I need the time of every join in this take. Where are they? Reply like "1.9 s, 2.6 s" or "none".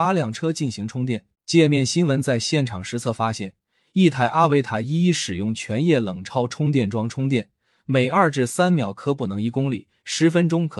1.3 s